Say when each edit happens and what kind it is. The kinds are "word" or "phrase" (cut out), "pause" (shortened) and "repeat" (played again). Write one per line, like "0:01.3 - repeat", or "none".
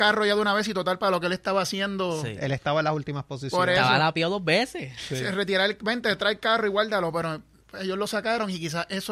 none